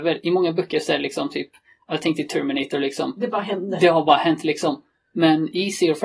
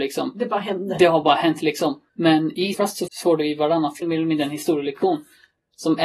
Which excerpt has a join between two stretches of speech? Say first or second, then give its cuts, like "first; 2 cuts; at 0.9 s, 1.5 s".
second; 4 cuts; at 2.1 s, 2.7 s, 3.1 s, 4.0 s